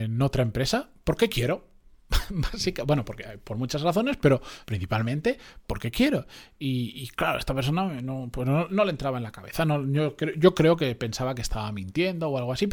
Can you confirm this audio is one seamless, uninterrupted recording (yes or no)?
no